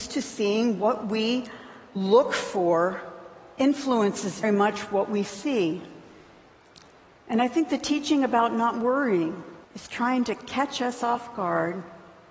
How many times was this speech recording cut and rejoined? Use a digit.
3